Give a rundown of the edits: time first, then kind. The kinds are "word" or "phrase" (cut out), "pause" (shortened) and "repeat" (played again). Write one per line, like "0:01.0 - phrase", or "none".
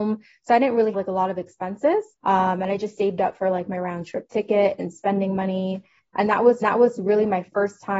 0:00.9 - word
0:02.1 - pause
0:04.9 - word
0:06.6 - repeat